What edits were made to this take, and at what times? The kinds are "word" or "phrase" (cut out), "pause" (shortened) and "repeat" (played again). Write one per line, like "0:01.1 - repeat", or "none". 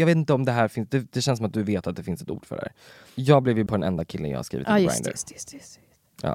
0:03.7 - word